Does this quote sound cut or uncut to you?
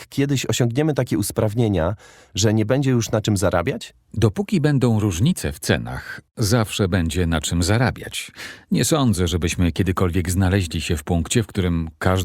uncut